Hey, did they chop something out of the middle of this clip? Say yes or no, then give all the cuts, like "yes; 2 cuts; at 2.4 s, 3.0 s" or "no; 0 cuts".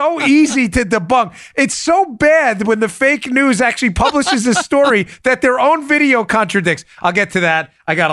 yes; 1 cut; at 1.7 s